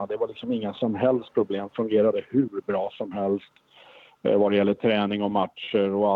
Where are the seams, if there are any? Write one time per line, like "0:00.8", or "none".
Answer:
none